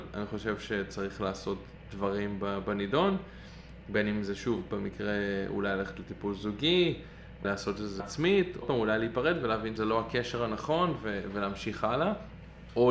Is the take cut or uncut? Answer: cut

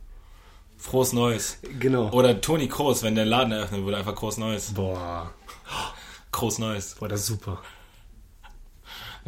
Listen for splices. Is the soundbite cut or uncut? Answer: uncut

